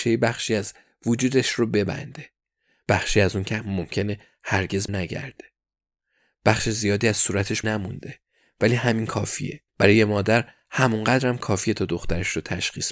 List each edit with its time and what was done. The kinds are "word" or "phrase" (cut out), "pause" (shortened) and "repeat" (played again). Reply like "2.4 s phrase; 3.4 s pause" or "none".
4.9 s word; 7.6 s word; 9.7 s pause